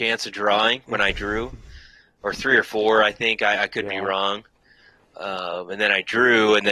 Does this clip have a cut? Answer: no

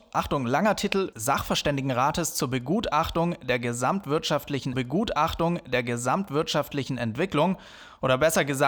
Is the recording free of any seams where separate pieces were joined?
no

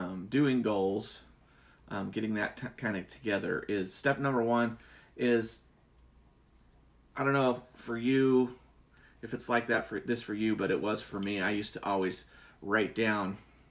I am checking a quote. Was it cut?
no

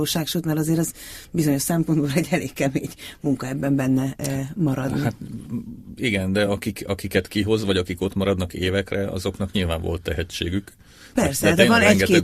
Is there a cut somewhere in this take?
no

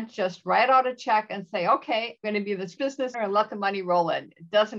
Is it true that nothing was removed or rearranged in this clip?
no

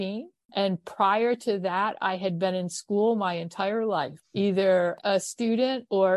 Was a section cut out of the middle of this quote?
yes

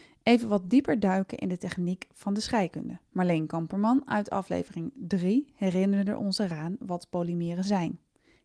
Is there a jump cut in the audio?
yes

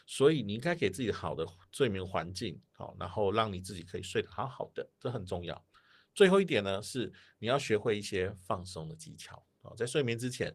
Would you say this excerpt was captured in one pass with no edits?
yes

